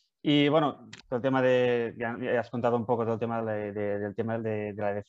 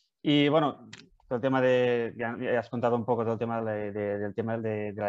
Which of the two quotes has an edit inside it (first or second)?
first